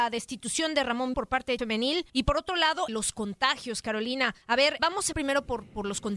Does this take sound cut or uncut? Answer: cut